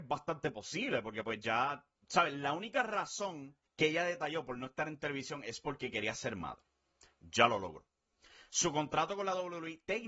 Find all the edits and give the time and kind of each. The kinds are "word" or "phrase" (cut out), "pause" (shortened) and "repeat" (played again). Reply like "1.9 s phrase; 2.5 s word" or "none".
2.0 s pause; 3.7 s pause